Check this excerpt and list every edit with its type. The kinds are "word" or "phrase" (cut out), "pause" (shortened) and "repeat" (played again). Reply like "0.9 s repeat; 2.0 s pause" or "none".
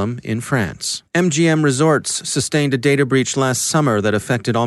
1.1 s pause